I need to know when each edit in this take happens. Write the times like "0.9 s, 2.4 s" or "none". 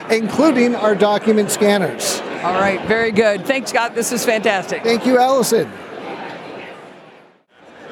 3.6 s